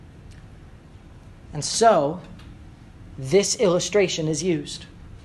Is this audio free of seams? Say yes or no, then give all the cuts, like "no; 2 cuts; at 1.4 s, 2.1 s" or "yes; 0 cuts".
yes; 0 cuts